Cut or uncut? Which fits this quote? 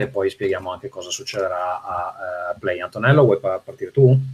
uncut